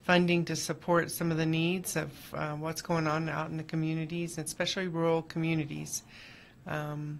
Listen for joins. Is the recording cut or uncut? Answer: uncut